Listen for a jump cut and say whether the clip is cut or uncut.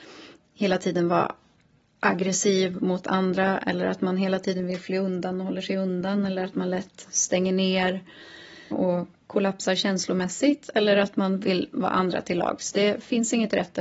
cut